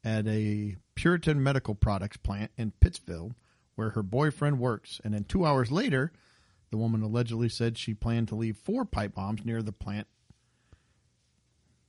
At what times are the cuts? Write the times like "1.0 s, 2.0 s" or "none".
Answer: none